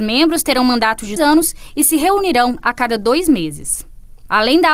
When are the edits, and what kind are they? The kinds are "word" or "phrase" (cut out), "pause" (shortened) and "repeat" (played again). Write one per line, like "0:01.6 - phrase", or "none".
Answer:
0:01.2 - word